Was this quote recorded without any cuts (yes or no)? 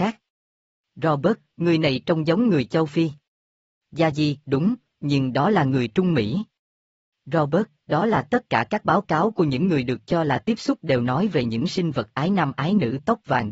yes